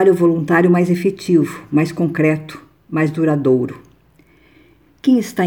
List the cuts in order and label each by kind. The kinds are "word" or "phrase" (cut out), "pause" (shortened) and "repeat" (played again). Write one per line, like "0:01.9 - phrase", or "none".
none

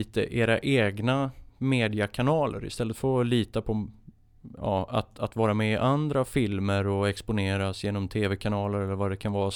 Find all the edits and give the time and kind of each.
none

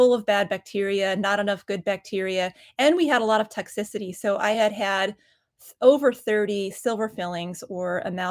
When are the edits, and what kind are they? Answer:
none

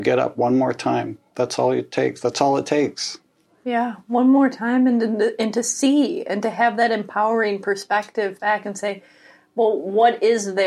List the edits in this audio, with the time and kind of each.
none

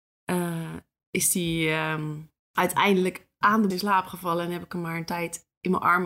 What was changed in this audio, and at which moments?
0:02.4 - pause
0:03.7 - word

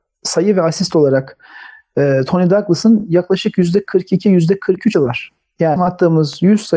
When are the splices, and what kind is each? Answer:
0:04.9 - word
0:05.8 - word

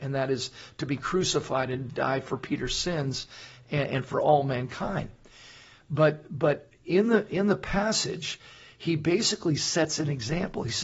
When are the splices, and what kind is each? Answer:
none

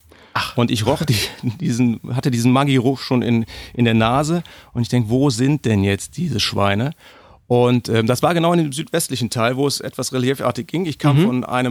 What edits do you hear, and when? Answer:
none

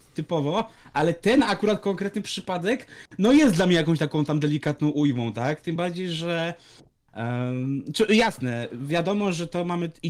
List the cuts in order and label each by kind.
none

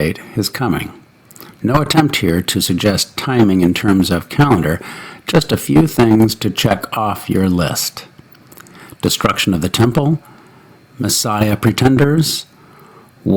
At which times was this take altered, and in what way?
none

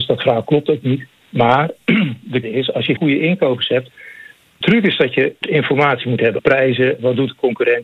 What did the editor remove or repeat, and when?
0:02.4 - word
0:03.0 - word
0:04.6 - word
0:05.4 - word
0:06.4 - word

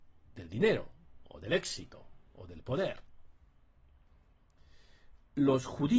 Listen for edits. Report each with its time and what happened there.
0:02.3 - pause

